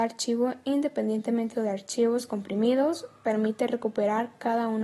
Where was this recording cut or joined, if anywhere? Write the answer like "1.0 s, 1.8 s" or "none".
1.5 s